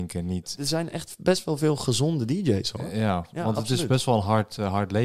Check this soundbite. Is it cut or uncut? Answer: uncut